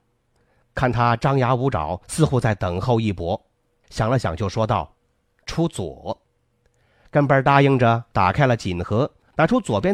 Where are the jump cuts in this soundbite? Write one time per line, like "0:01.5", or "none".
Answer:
0:05.0
0:06.2

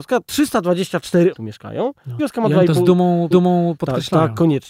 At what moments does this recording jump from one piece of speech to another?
0:01.3
0:02.2
0:03.3

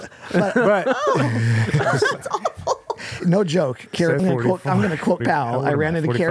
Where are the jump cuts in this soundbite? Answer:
0:03.2
0:04.2
0:05.2

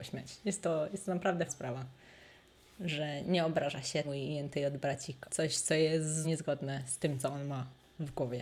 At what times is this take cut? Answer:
0:01.5
0:03.2
0:04.0
0:05.3
0:06.2

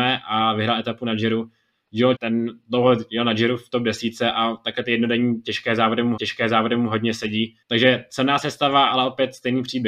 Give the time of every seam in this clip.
0:02.1
0:06.2
0:07.6

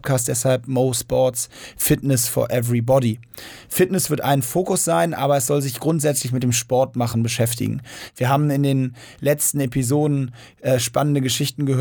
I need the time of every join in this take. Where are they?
none

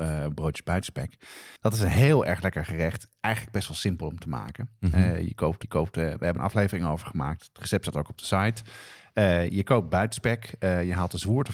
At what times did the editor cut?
0:01.6
0:05.6
0:06.4

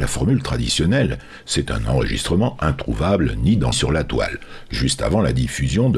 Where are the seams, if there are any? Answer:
0:03.7

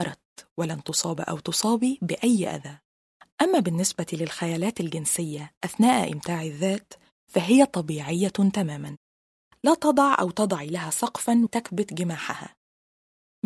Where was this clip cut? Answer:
0:11.5

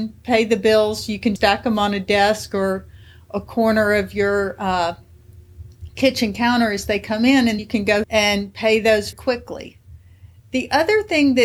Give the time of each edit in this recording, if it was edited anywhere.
0:01.4
0:07.6
0:08.0
0:09.1

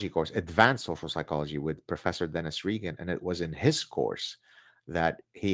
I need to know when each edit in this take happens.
none

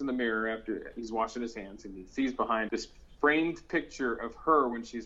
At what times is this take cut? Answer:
0:02.7

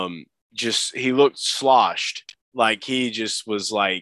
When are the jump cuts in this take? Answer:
none

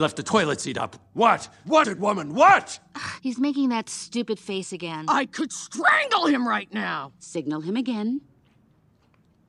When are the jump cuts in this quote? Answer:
0:01.8

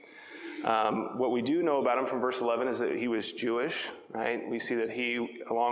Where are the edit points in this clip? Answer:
none

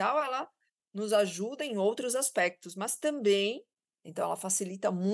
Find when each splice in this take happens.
none

